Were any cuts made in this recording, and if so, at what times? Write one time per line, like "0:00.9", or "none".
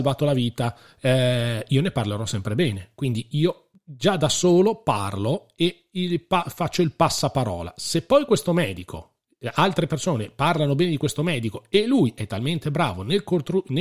none